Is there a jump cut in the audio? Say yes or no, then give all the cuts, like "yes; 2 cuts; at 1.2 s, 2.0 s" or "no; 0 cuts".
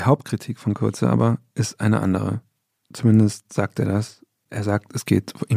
no; 0 cuts